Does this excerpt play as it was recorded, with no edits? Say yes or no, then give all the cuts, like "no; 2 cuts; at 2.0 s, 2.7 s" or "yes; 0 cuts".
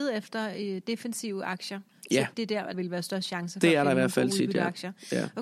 no; 2 cuts; at 2.3 s, 2.7 s